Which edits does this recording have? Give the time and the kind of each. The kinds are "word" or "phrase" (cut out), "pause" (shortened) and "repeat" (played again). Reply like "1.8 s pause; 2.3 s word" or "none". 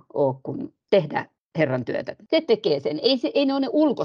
none